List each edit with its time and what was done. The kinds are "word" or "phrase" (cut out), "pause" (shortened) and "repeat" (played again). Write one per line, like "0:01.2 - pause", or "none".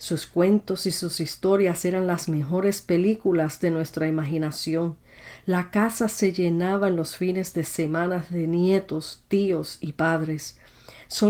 none